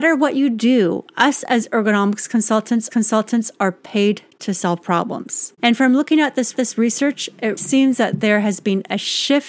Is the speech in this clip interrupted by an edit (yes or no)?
yes